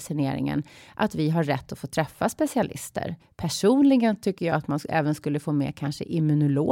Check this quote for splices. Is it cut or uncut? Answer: cut